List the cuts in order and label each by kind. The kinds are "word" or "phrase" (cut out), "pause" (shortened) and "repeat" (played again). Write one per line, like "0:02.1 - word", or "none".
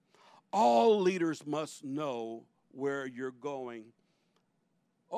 none